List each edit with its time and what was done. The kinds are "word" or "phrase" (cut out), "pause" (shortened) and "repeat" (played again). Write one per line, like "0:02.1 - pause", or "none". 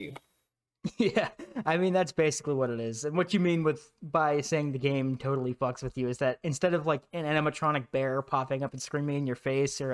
none